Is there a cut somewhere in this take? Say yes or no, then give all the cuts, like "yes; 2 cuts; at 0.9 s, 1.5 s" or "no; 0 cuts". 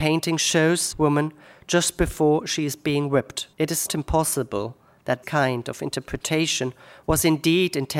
yes; 4 cuts; at 0.9 s, 3.5 s, 3.9 s, 5.2 s